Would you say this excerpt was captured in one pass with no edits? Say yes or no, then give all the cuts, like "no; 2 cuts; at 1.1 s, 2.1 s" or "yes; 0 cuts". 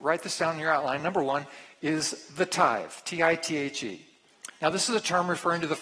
yes; 0 cuts